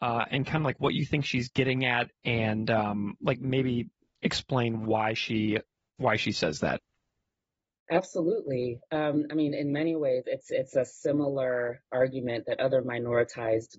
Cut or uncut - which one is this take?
uncut